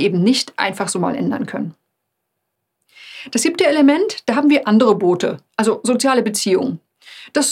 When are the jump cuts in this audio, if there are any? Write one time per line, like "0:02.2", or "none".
none